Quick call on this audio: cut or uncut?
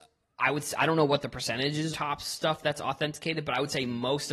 cut